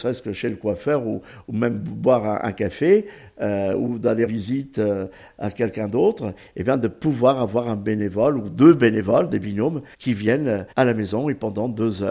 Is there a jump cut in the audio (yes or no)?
yes